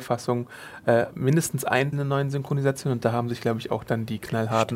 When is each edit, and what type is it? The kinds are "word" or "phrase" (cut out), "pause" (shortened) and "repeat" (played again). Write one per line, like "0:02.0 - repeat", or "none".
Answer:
0:01.9 - word